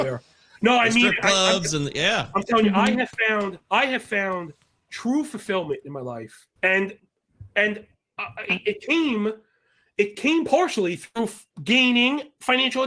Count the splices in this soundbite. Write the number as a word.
three